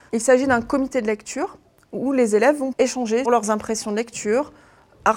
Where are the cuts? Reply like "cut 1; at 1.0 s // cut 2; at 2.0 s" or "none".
cut 1; at 2.7 s // cut 2; at 3.3 s